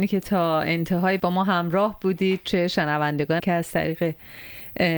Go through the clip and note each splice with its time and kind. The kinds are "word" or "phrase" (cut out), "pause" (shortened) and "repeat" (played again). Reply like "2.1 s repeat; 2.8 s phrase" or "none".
1.2 s word; 3.4 s word